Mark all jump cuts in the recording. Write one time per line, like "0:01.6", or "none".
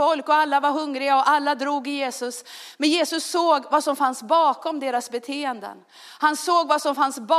none